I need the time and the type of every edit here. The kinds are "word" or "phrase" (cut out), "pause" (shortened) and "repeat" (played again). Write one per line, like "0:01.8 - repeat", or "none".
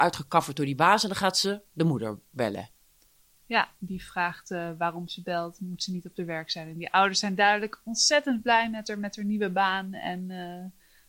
none